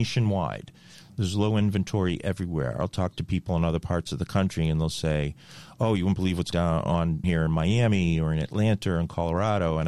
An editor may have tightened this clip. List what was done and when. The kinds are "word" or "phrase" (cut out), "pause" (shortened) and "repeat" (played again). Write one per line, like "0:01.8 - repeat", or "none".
0:06.5 - word
0:07.2 - word